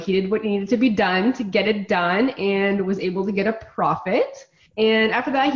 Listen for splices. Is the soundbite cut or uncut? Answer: uncut